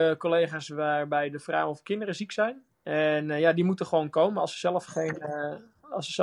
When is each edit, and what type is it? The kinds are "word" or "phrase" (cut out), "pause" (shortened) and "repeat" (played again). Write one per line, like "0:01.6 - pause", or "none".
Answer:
0:02.7 - pause